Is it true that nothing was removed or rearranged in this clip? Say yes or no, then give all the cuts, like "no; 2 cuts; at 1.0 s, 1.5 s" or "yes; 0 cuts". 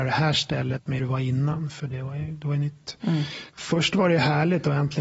no; 2 cuts; at 1.0 s, 3.5 s